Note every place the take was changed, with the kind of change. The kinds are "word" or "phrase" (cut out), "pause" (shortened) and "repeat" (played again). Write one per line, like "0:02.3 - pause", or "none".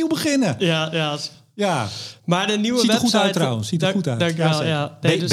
none

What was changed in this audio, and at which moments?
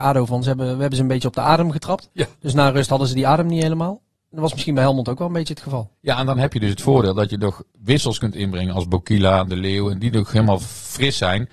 0:02.1 - pause
0:07.7 - pause

